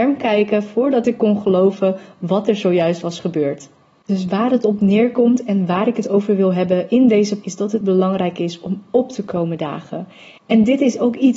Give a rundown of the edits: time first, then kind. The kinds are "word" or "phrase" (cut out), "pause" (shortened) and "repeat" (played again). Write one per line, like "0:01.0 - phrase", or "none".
0:07.4 - word
0:07.8 - phrase